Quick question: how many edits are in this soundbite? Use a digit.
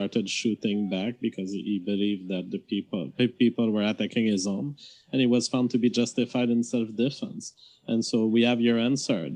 0